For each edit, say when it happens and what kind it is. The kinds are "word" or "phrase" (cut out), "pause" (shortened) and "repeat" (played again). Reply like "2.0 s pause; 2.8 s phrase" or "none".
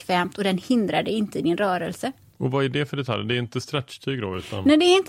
none